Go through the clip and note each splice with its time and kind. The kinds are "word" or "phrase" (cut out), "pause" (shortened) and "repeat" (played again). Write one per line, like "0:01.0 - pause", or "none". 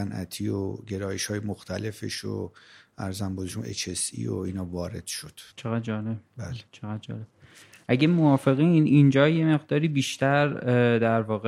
0:05.5 - pause
0:06.7 - pause